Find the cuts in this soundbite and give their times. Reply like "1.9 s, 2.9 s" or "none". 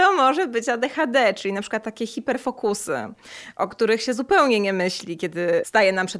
none

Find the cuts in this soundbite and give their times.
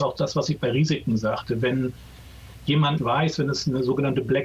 3.0 s

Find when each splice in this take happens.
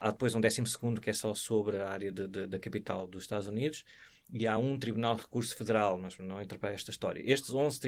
none

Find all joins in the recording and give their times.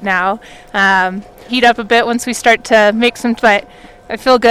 1.5 s, 3.4 s

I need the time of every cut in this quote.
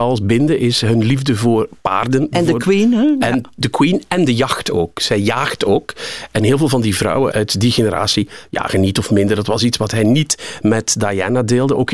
7.3 s

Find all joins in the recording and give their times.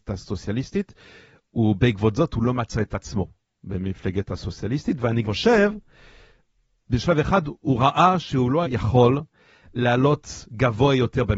5.2 s, 8.6 s

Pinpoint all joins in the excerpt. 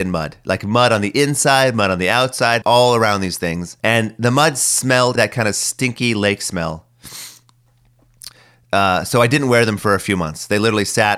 2.6 s, 3.8 s, 5.2 s

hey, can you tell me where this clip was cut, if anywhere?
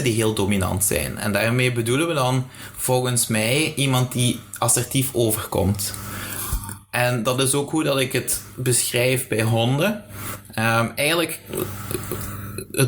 none

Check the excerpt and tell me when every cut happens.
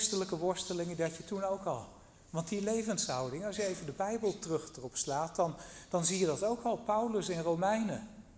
none

